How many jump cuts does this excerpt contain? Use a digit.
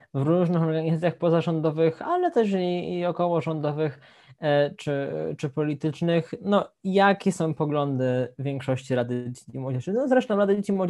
0